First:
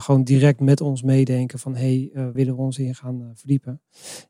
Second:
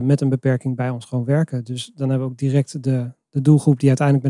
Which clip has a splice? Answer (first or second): first